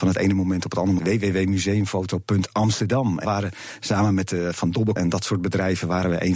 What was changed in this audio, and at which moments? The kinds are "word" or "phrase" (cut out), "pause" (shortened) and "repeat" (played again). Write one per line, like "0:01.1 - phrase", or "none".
0:01.0 - word
0:03.2 - word
0:05.0 - word